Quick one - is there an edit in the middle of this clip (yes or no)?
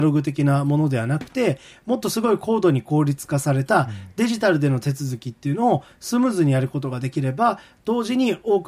no